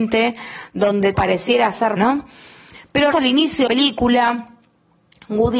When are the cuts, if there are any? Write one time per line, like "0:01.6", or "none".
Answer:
0:01.1
0:02.0
0:03.1
0:03.7

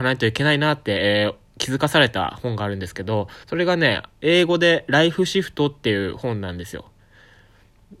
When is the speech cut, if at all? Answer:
0:03.4

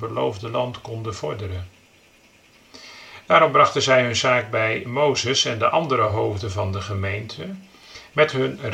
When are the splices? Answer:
none

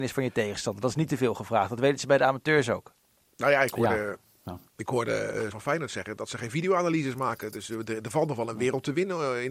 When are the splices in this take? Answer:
0:04.7
0:05.5

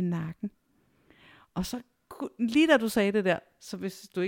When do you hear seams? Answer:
none

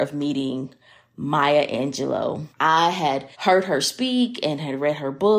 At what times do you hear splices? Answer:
0:02.5
0:03.3

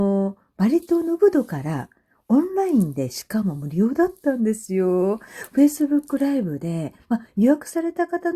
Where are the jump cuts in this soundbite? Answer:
none

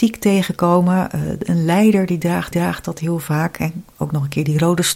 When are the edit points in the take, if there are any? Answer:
0:02.5

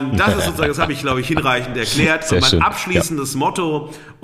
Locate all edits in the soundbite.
none

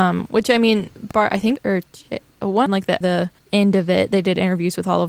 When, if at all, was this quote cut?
0:01.6
0:02.7
0:03.0
0:03.4

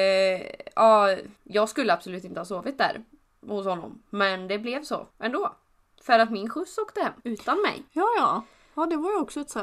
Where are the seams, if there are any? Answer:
0:01.4
0:05.1
0:07.2
0:07.9

